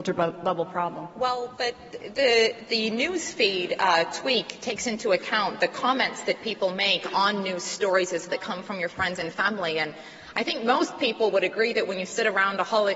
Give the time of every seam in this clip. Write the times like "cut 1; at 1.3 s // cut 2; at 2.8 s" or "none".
cut 1; at 8.3 s